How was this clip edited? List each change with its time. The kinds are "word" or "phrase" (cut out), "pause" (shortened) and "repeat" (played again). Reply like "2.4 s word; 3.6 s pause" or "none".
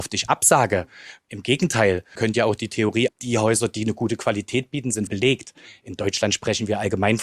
2.2 s word; 3.1 s word; 5.1 s word